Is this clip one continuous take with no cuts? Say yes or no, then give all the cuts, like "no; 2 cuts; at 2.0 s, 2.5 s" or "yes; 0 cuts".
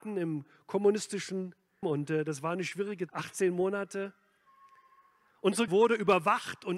no; 3 cuts; at 1.8 s, 3.1 s, 5.7 s